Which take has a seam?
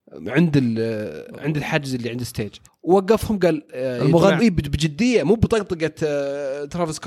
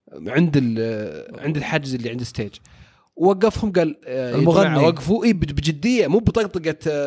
first; 2 cuts; at 2.7 s, 4.4 s

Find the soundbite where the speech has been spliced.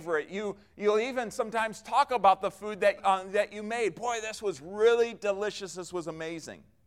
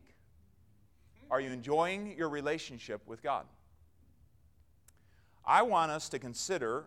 first; 1 cut; at 3.0 s

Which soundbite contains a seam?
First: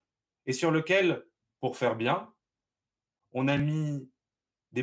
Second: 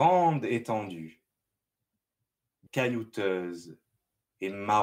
second; 1 cut; at 2.7 s

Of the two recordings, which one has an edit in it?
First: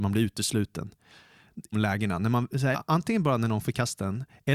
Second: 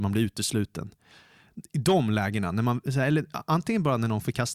first; 2 cuts; at 1.7 s, 2.7 s

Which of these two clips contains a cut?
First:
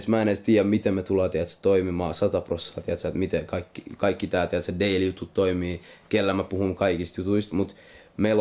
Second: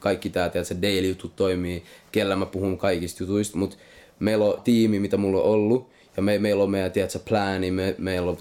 second; 1 cut; at 4.6 s

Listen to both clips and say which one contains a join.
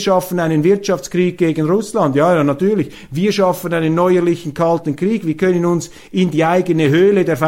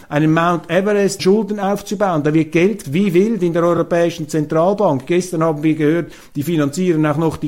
second; 2 cuts; at 1.2 s, 2.8 s

